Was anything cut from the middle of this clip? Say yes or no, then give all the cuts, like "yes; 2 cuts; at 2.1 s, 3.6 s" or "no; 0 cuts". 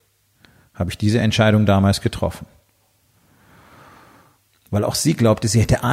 no; 0 cuts